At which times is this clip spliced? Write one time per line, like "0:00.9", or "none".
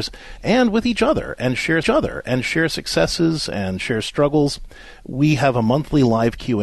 0:01.8